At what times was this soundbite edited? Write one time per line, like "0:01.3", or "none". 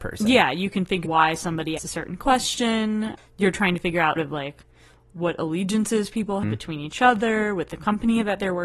0:01.0
0:01.8
0:03.2
0:04.2
0:06.4